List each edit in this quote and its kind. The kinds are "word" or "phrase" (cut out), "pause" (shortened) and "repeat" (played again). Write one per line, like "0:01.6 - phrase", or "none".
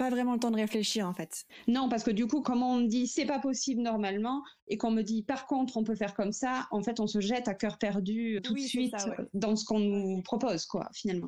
0:02.4 - word
0:08.4 - word